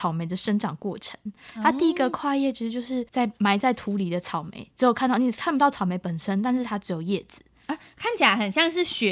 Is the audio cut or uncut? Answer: cut